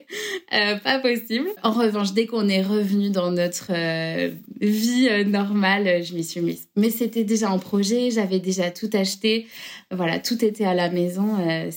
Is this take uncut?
yes; 0 cuts

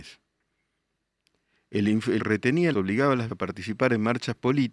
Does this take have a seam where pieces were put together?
yes; 3 cuts; at 2.2 s, 2.7 s, 3.3 s

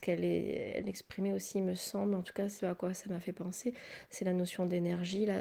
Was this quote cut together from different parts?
yes; 1 cut; at 2.6 s

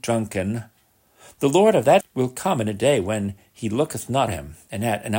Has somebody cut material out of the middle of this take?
yes; 2 cuts; at 2.0 s, 4.3 s

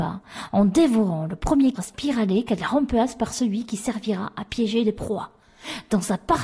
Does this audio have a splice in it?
yes; 1 cut; at 1.8 s

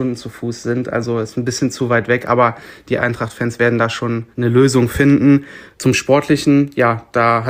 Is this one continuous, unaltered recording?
no; 1 cut; at 4.3 s

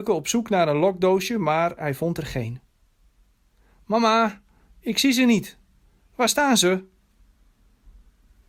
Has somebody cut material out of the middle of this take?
no; 0 cuts

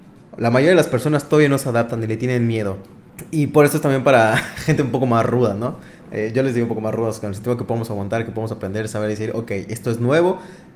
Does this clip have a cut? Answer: no; 0 cuts

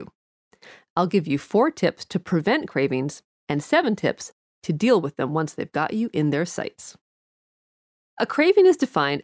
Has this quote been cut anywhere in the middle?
no; 0 cuts

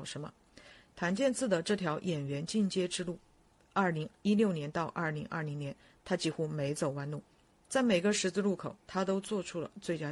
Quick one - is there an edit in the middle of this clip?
no; 0 cuts

